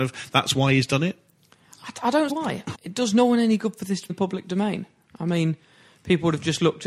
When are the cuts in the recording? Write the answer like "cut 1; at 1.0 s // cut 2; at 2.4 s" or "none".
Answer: cut 1; at 2.3 s // cut 2; at 2.7 s // cut 3; at 4.1 s